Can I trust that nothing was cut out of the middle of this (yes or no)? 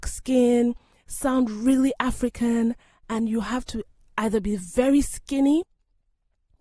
yes